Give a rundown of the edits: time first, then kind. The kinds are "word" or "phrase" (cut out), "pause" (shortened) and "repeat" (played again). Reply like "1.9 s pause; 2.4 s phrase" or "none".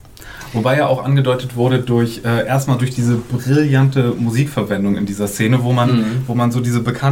none